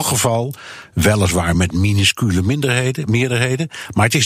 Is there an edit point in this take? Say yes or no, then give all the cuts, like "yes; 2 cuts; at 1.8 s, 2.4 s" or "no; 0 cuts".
no; 0 cuts